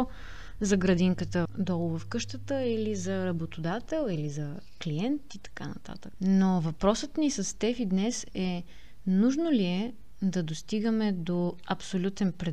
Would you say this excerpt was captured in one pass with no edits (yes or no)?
yes